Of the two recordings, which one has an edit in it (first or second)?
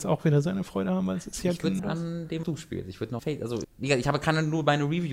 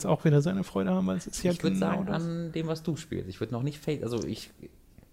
first